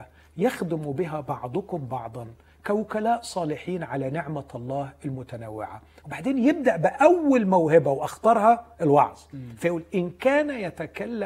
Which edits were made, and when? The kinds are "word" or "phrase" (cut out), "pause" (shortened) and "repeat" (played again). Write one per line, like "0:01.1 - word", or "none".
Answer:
none